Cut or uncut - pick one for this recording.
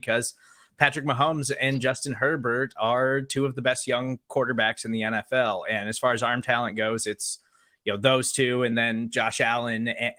uncut